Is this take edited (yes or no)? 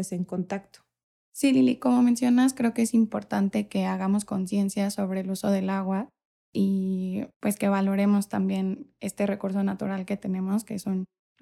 yes